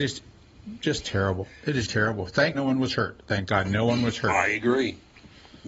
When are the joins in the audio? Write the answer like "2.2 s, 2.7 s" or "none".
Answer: 1.9 s, 2.5 s